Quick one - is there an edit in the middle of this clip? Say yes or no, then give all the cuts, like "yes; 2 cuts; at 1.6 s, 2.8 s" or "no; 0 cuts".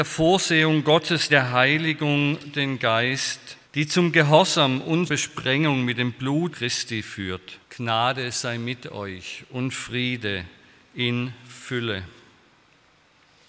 yes; 6 cuts; at 1.3 s, 2.5 s, 3.6 s, 5.1 s, 6.5 s, 7.6 s